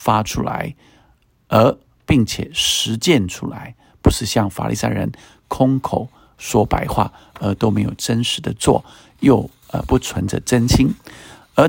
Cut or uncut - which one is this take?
uncut